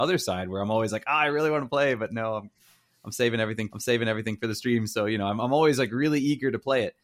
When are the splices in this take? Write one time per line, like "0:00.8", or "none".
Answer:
0:03.7